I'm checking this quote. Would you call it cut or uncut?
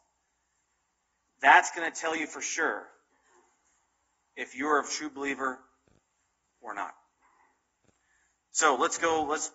uncut